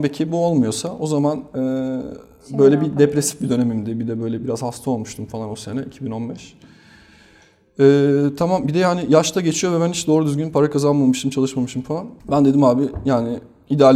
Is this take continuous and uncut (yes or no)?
no